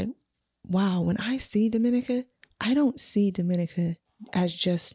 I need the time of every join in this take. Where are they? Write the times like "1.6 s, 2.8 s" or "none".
2.3 s